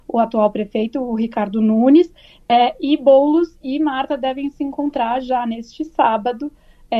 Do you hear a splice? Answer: no; 0 cuts

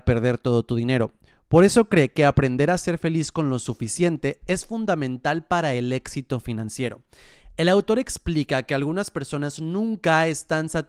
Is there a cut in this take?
no; 0 cuts

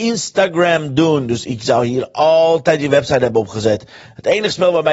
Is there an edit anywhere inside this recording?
no; 0 cuts

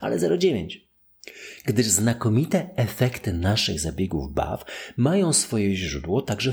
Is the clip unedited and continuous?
yes; 0 cuts

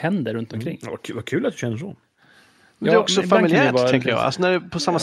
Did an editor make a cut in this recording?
no; 0 cuts

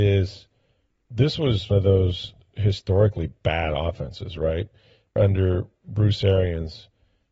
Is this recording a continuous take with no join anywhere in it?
no; 2 cuts; at 1.7 s, 5.2 s

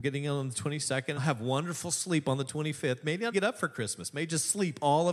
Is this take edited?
yes; 2 cuts; at 1.2 s, 3.3 s

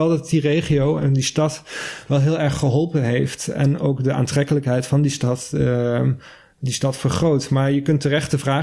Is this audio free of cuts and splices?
yes; 0 cuts

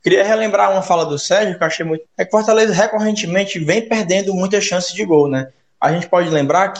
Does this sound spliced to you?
yes; 1 cut; at 2.1 s

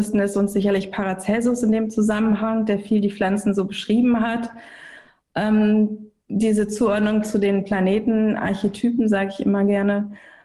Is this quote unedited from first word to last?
yes; 0 cuts

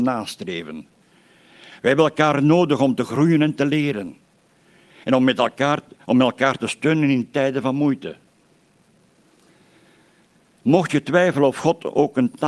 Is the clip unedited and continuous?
yes; 0 cuts

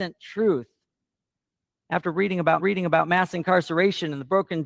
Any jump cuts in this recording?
yes; 1 cut; at 2.6 s

